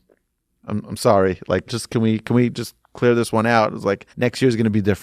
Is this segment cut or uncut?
cut